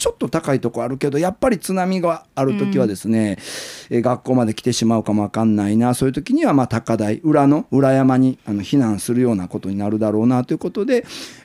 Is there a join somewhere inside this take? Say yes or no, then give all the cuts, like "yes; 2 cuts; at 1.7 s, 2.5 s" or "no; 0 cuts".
yes; 1 cut; at 8.4 s